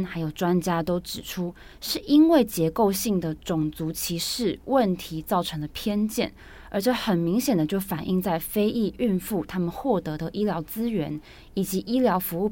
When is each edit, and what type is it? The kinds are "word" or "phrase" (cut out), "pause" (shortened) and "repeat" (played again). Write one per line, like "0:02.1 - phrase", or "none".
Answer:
none

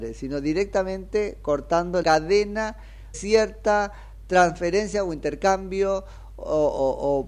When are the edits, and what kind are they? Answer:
0:02.0 - word
0:03.1 - word

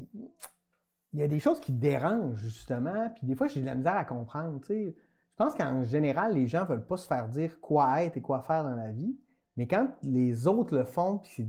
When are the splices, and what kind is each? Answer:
none

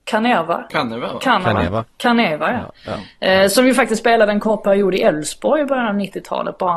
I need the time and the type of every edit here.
none

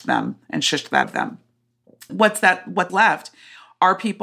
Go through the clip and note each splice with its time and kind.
0:01.0 - word
0:02.1 - word
0:02.9 - word

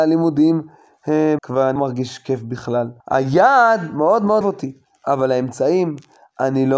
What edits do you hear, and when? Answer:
0:01.4 - phrase
0:01.8 - word
0:03.0 - pause
0:04.4 - phrase

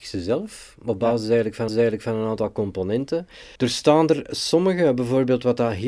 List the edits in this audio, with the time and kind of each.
0:01.7 - repeat
0:03.6 - pause

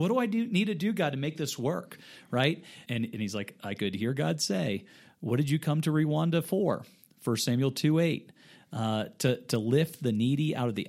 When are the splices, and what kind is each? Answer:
0:02.9 - word

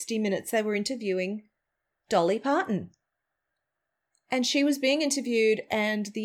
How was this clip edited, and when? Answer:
none

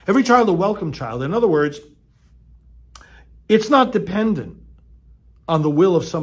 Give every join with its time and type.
none

